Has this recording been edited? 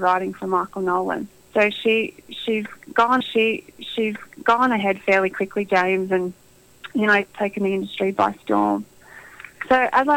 yes; 3 cuts; at 1.4 s, 3.2 s, 7.2 s

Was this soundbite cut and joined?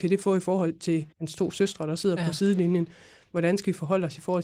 yes; 1 cut; at 1.1 s

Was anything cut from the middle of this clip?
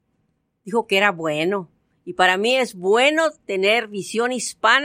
no; 0 cuts

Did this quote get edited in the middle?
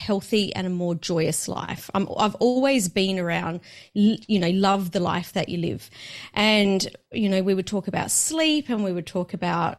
no; 0 cuts

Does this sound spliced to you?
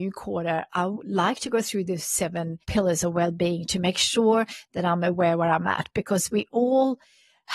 yes; 1 cut; at 2.6 s

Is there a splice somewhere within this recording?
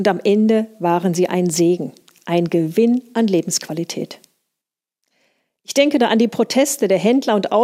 no; 0 cuts

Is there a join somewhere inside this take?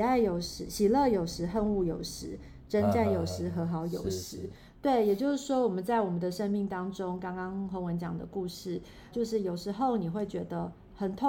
yes; 1 cut; at 9.1 s

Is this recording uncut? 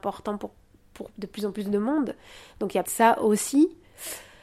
no; 1 cut; at 2.8 s

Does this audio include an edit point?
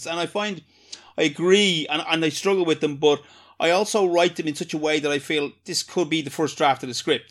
no; 0 cuts

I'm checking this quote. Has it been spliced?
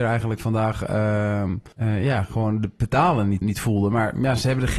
yes; 2 cuts; at 1.7 s, 3.4 s

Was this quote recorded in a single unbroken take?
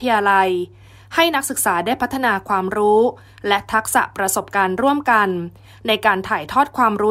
yes; 0 cuts

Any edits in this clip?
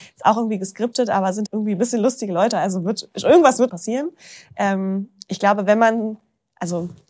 yes; 2 cuts; at 1.5 s, 3.7 s

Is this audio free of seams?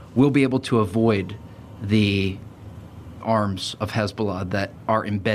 no; 1 cut; at 3.2 s

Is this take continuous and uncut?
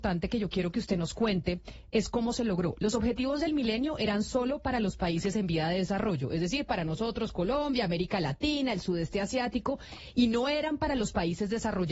yes; 0 cuts

